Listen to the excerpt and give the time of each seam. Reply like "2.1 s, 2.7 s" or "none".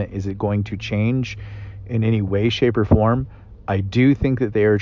none